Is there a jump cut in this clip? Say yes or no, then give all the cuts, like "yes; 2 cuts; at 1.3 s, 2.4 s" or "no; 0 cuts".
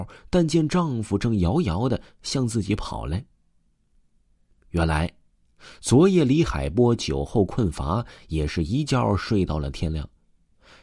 no; 0 cuts